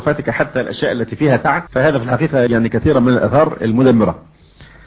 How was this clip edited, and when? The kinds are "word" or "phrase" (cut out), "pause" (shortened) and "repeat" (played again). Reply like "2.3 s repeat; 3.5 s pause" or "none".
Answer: 1.7 s pause; 2.5 s word